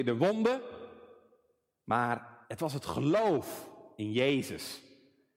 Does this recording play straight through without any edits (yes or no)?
no